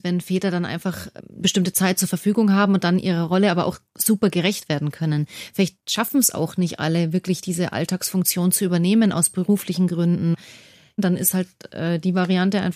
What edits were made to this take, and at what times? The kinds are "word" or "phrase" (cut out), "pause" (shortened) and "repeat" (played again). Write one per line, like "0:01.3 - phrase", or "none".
0:01.4 - word
0:03.9 - pause